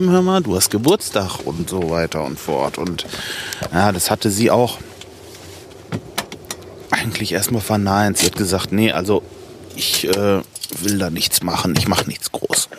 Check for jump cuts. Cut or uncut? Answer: cut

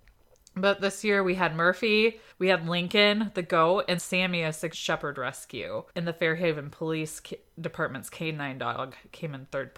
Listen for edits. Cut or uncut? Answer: cut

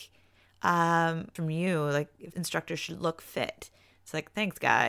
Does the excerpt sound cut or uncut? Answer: cut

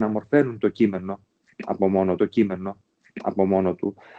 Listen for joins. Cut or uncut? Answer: cut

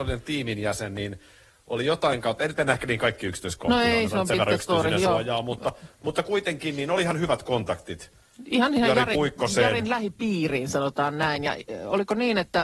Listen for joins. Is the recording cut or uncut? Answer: uncut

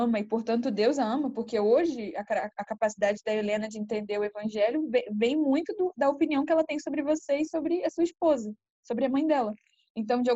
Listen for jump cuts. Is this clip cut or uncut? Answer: uncut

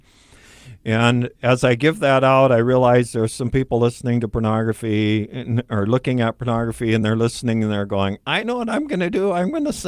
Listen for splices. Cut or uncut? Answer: uncut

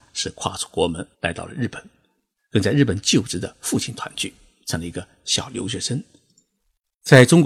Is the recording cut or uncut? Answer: cut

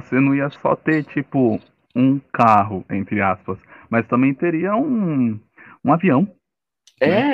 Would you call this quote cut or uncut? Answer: uncut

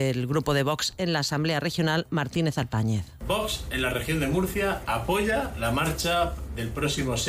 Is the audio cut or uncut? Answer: uncut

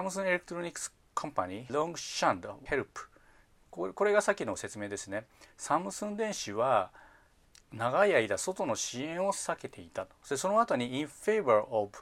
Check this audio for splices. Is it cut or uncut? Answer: cut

